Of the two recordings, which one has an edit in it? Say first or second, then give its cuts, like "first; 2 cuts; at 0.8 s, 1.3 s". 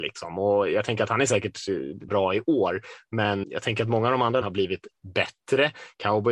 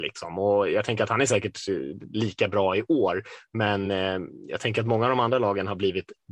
first; 3 cuts; at 2.1 s, 3.4 s, 4.4 s